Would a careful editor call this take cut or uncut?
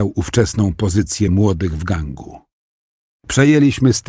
uncut